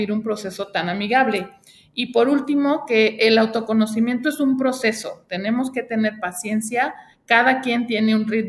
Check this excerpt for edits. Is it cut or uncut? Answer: uncut